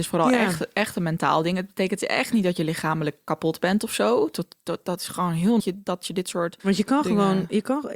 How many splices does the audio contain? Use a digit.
2